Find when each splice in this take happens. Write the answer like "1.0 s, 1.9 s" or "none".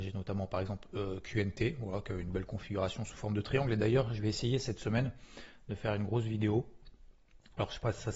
none